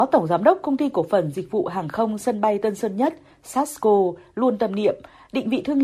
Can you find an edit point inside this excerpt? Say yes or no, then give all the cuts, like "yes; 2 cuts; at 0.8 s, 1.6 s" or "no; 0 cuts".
no; 0 cuts